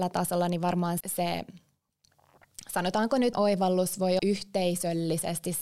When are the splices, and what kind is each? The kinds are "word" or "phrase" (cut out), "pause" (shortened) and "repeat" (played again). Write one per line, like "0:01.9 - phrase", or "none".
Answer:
0:01.0 - word
0:03.3 - word
0:04.2 - word